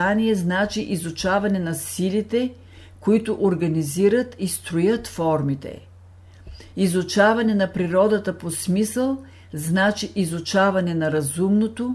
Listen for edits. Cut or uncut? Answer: uncut